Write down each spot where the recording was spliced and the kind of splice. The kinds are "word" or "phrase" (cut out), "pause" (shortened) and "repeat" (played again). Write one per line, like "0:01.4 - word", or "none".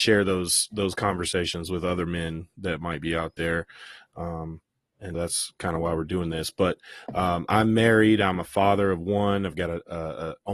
0:05.1 - word